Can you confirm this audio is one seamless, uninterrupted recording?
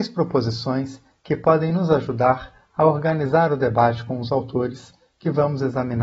yes; 0 cuts

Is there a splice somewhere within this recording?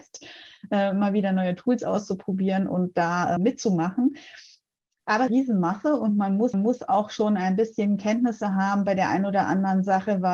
yes; 3 cuts; at 3.4 s, 5.3 s, 6.5 s

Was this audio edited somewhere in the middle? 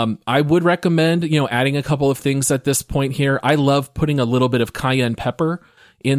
no; 0 cuts

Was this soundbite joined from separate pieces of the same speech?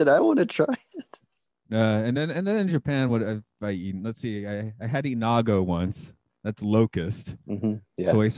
no; 0 cuts

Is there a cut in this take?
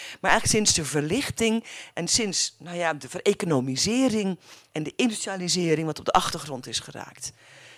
no; 0 cuts

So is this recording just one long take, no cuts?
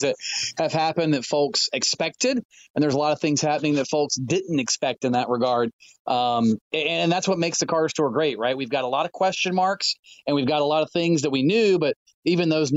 yes; 0 cuts

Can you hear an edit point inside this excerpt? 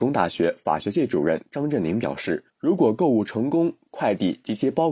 yes; 1 cut; at 2.5 s

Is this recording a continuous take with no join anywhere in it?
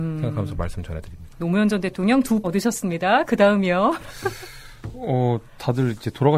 no; 1 cut; at 2.4 s

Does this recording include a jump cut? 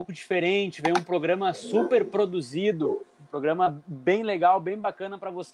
no; 0 cuts

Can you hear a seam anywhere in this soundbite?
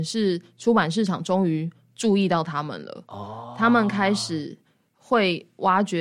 no; 0 cuts

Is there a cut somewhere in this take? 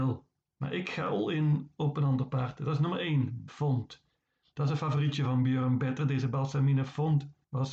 yes; 1 cut; at 3.5 s

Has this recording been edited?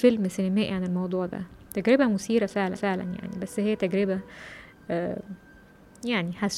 yes; 1 cut; at 2.8 s

